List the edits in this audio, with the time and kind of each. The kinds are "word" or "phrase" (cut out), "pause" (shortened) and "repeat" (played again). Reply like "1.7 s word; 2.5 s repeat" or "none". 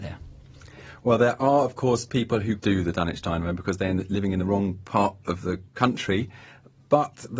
2.6 s word